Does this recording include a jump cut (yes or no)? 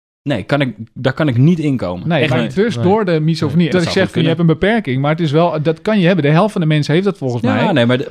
yes